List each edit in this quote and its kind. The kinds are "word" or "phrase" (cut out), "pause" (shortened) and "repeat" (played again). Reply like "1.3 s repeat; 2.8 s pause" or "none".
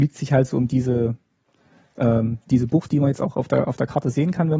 none